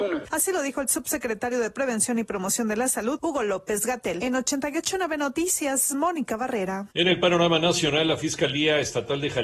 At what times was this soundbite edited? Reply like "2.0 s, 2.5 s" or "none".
none